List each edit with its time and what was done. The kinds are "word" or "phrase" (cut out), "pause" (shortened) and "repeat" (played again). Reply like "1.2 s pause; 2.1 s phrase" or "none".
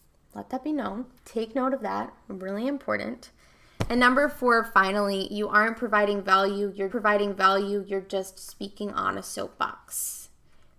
1.2 s pause; 6.9 s repeat